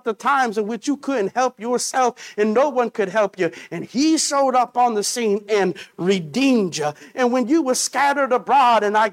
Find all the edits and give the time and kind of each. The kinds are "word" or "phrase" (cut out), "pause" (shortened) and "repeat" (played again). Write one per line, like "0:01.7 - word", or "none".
none